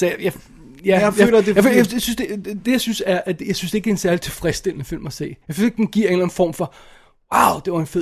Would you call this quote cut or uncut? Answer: cut